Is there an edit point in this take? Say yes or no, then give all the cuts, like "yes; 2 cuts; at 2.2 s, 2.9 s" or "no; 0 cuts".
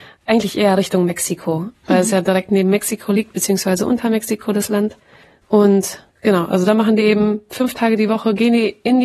no; 0 cuts